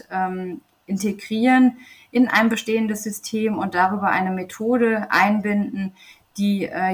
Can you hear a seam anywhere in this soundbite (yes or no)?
no